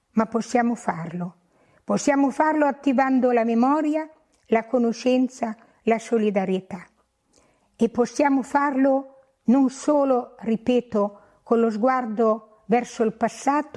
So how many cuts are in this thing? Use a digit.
0